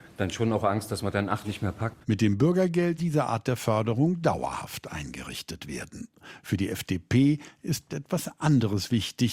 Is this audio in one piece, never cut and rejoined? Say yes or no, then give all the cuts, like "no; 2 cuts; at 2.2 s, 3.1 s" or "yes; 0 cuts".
no; 4 cuts; at 1.4 s, 2.0 s, 3.0 s, 7.9 s